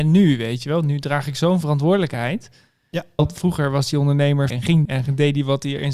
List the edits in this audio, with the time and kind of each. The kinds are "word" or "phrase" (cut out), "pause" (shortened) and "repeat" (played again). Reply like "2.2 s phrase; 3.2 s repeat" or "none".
3.2 s word; 4.5 s word; 4.8 s word

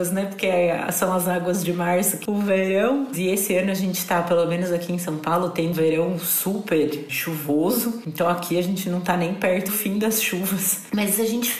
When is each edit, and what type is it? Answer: 2.3 s word; 5.7 s word; 9.7 s word

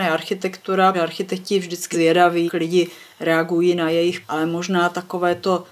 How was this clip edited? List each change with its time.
0.9 s word; 1.9 s word; 2.5 s word; 4.2 s word

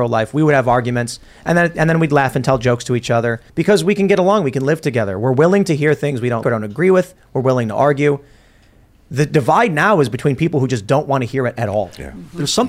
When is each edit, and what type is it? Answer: 3.5 s pause; 6.4 s word

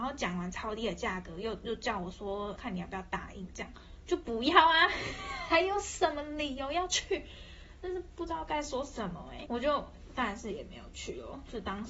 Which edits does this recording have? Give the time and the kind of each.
2.6 s word; 9.5 s word

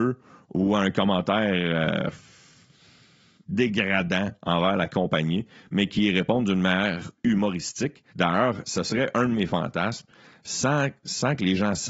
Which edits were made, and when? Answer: 8.1 s pause

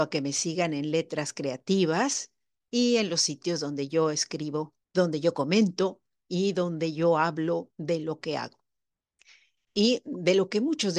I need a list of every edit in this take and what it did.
4.8 s pause

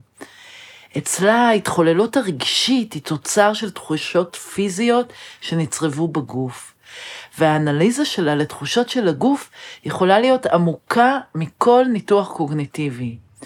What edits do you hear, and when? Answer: none

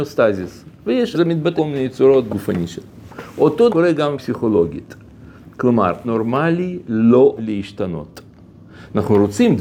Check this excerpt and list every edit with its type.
1.1 s word; 1.6 s word; 2.3 s word; 3.7 s word; 4.2 s word; 6.0 s word; 7.4 s word

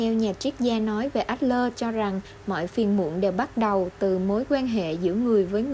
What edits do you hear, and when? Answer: none

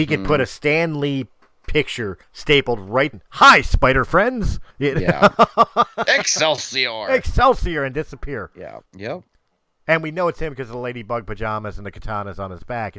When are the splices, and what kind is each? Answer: 2.2 s pause; 3.1 s phrase; 4.7 s pause; 8.9 s pause

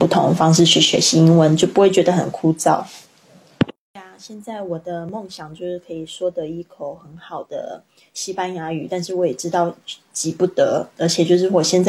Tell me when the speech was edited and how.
none

